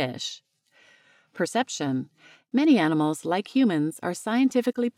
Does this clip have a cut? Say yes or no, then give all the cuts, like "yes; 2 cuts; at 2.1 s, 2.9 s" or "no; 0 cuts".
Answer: no; 0 cuts